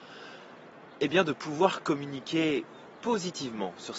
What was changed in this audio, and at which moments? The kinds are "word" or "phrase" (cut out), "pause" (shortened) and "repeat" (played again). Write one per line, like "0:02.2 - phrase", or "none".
none